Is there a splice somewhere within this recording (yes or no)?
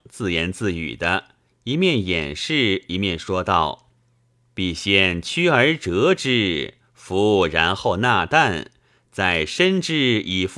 no